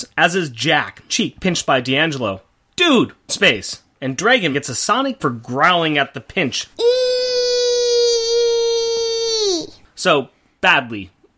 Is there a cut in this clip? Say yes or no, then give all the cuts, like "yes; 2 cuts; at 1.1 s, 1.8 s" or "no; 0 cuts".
yes; 5 cuts; at 1.1 s, 3.3 s, 4.5 s, 5.2 s, 6.7 s